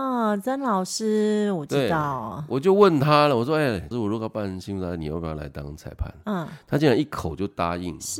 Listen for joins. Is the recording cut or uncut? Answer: cut